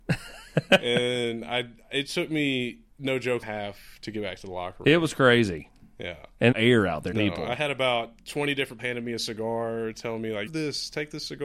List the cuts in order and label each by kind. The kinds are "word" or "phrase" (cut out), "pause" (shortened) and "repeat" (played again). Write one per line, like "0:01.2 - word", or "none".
0:02.9 - pause
0:03.4 - phrase
0:06.5 - phrase
0:07.1 - phrase
0:08.8 - word
0:10.5 - phrase

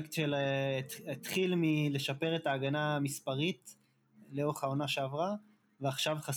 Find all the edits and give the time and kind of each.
none

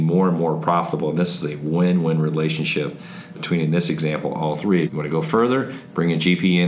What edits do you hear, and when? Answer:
0:04.9 - phrase

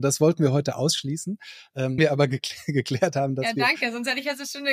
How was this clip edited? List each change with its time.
0:02.0 - word

